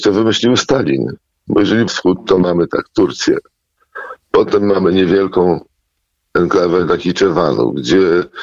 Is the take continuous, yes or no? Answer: no